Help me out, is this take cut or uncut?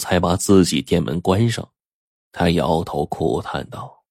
uncut